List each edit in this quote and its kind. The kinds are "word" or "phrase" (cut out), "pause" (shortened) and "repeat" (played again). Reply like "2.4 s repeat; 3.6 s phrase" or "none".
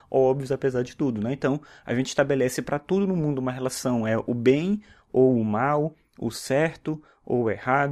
none